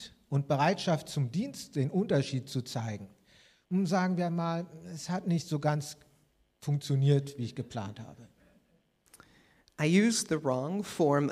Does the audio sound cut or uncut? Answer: uncut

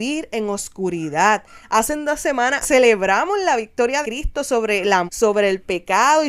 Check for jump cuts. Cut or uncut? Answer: cut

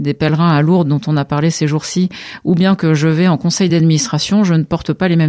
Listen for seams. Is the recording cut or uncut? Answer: uncut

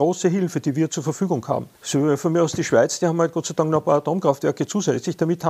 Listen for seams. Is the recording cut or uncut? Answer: cut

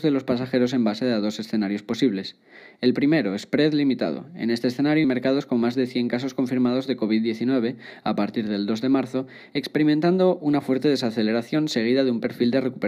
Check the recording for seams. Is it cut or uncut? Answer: cut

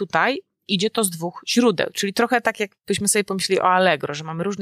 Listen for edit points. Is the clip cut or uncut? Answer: uncut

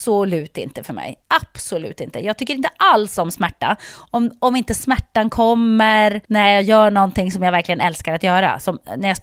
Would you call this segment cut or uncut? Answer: cut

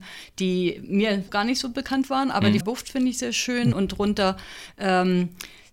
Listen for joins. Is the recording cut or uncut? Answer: cut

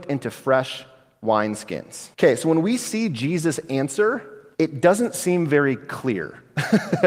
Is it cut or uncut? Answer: cut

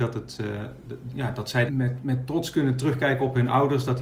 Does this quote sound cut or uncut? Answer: cut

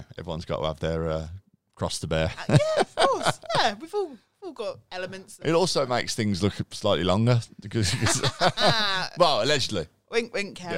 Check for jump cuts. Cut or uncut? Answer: uncut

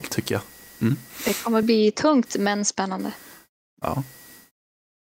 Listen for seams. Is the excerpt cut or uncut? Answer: uncut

